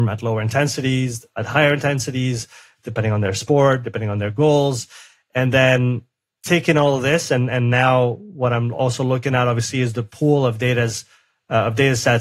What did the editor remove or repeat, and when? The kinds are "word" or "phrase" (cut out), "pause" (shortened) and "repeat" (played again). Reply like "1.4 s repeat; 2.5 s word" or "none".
none